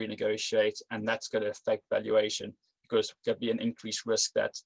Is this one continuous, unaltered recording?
no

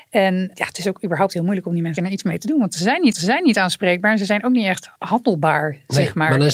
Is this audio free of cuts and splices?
no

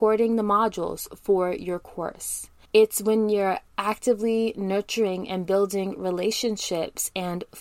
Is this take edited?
no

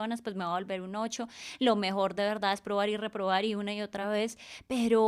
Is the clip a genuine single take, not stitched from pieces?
yes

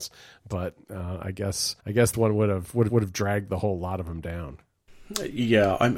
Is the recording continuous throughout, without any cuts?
no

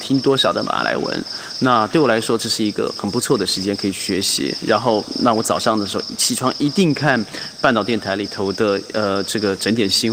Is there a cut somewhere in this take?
no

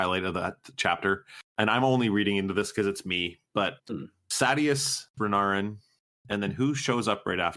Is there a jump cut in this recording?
yes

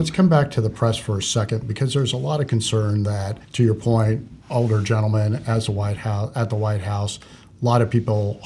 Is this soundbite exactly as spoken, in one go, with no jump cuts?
no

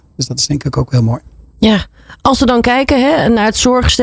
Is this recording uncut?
yes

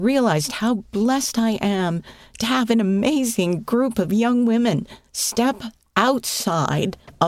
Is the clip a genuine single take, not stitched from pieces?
yes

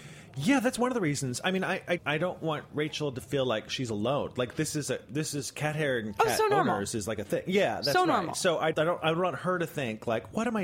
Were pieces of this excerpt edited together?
yes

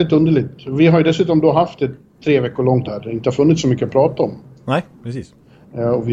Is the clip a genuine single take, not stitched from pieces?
no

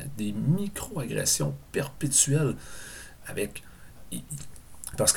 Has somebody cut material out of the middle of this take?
no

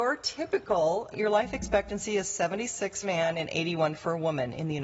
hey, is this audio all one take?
no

